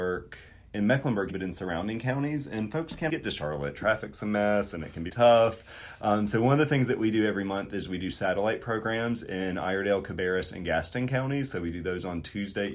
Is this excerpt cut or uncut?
cut